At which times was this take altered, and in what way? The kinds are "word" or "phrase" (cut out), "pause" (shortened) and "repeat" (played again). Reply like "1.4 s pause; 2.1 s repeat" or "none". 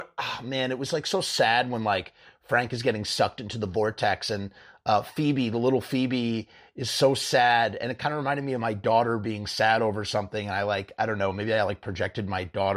none